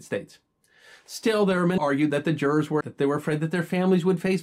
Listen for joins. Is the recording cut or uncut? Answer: cut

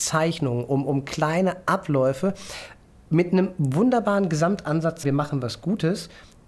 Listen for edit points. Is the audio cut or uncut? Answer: cut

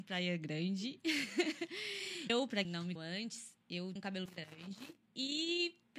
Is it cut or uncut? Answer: cut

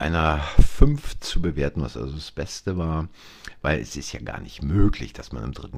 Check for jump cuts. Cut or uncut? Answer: uncut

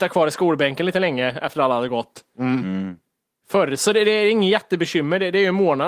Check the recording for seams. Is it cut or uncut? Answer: uncut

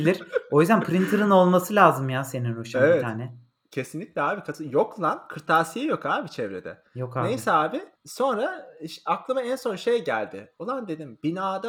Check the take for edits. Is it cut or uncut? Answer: cut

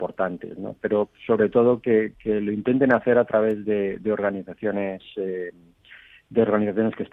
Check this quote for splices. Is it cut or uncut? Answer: uncut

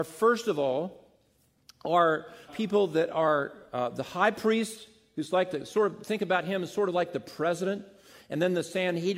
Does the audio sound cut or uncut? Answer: cut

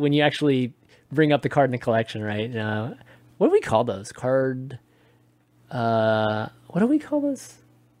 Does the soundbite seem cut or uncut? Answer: uncut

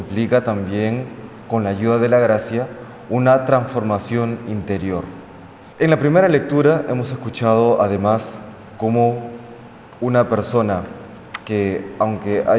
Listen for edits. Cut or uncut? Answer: cut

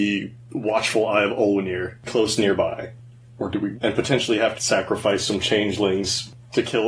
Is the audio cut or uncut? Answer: cut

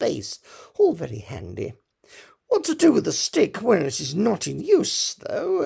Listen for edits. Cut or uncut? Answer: uncut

